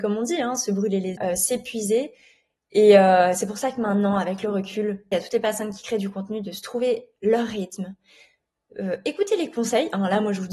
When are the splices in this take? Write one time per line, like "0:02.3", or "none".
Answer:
0:01.2
0:05.1